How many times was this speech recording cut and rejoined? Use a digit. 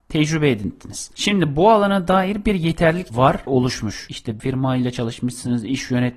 3